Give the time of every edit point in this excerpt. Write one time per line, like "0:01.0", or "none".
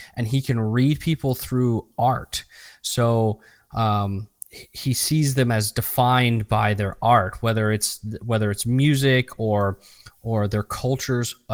none